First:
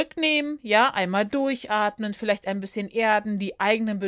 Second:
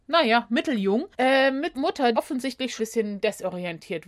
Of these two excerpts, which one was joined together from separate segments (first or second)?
second